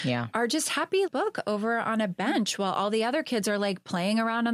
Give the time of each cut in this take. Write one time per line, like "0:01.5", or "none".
0:01.1